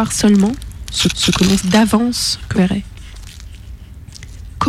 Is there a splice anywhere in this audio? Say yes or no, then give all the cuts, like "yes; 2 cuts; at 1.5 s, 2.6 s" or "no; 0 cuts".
yes; 3 cuts; at 1.1 s, 1.6 s, 2.5 s